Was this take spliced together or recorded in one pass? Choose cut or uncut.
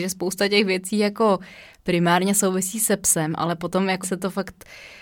cut